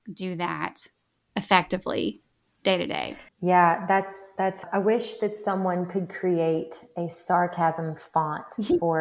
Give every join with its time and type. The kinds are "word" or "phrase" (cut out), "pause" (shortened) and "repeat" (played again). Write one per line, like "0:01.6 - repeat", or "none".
0:03.3 - pause